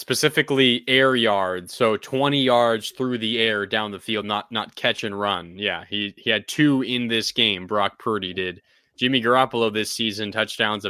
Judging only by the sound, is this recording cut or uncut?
uncut